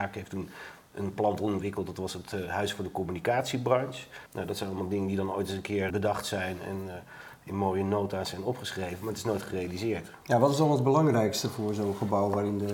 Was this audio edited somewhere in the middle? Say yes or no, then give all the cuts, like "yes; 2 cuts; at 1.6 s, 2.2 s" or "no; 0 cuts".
yes; 2 cuts; at 4.3 s, 5.9 s